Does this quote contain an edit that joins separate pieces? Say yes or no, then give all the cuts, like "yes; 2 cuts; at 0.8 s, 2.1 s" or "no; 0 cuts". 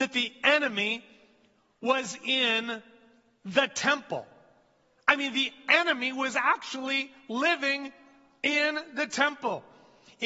no; 0 cuts